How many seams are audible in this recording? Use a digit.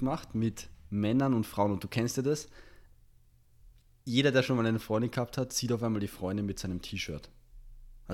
0